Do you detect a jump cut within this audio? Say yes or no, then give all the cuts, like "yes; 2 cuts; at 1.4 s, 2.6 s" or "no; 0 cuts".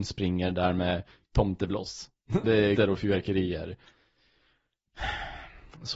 yes; 2 cuts; at 2.4 s, 2.8 s